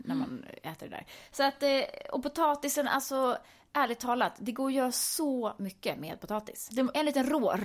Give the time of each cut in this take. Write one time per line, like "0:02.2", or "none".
none